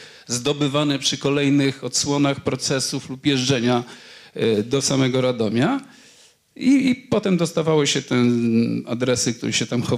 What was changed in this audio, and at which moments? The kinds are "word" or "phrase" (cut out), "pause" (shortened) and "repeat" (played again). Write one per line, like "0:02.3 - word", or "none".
none

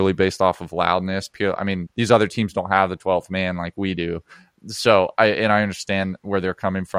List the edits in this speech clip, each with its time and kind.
none

